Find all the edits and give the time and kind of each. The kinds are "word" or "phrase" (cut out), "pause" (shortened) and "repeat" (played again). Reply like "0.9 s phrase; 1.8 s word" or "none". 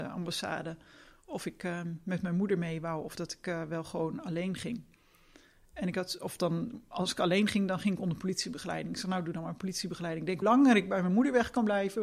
10.4 s word